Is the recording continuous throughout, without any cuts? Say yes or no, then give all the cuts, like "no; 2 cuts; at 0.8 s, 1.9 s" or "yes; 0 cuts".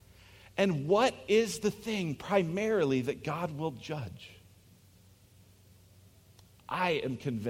yes; 0 cuts